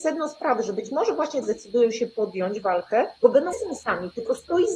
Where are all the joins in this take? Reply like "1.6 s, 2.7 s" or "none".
1.4 s, 3.2 s, 3.5 s